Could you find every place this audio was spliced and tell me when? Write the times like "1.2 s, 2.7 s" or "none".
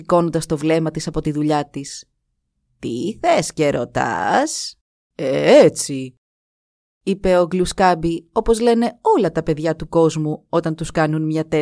4.9 s